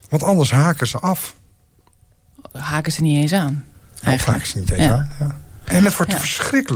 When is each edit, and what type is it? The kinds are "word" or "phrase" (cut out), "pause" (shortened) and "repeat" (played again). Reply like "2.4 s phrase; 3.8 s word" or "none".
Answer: none